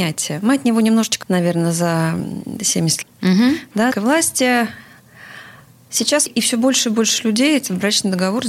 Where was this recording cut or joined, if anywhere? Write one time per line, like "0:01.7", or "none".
0:01.2
0:03.0
0:03.9
0:06.3